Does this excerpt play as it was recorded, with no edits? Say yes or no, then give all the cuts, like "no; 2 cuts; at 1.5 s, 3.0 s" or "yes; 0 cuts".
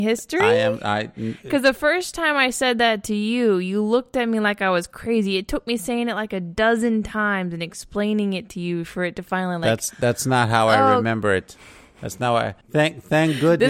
no; 1 cut; at 12.6 s